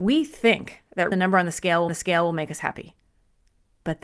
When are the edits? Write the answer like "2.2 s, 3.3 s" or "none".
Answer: 1.1 s, 1.9 s